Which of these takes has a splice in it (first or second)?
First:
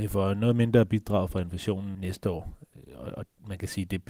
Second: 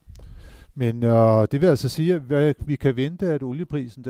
first